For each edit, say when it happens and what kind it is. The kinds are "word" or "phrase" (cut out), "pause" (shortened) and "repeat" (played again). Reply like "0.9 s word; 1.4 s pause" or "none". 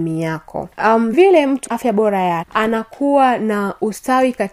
1.1 s word; 1.7 s word; 2.4 s word